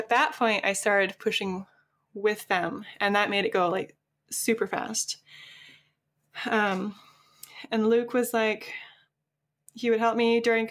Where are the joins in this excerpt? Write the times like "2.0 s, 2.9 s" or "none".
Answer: none